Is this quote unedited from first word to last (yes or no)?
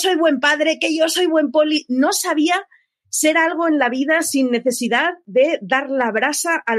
yes